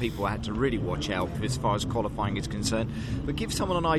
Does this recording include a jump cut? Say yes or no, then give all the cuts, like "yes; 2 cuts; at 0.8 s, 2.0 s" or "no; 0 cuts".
yes; 1 cut; at 1.3 s